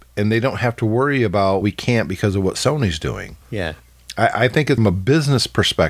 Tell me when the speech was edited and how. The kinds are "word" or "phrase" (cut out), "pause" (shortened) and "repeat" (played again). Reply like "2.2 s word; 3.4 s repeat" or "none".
1.6 s word; 3.4 s pause; 4.8 s phrase